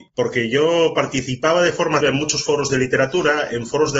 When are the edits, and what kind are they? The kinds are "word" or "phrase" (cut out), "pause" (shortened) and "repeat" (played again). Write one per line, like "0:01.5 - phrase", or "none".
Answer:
0:02.0 - word